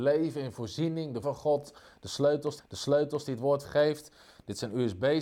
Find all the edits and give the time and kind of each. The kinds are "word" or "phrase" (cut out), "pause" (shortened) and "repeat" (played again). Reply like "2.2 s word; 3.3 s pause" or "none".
1.2 s word; 2.6 s repeat; 3.6 s phrase